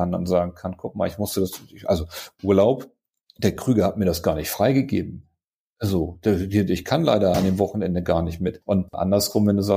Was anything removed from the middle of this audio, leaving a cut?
no; 0 cuts

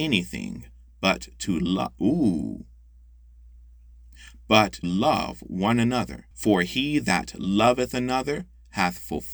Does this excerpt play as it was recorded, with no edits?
no; 2 cuts; at 4.8 s, 6.3 s

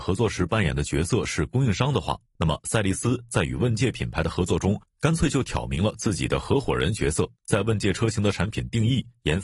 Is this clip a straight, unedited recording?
no; 1 cut; at 7.4 s

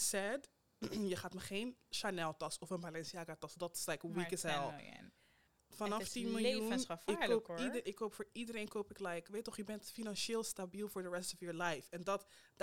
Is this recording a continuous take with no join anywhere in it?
yes; 0 cuts

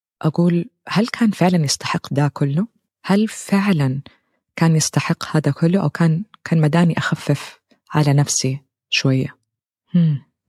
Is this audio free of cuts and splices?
yes; 0 cuts

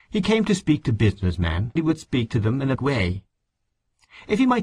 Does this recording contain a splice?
yes; 2 cuts; at 1.8 s, 2.8 s

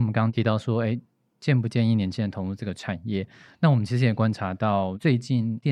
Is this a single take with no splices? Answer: yes; 0 cuts

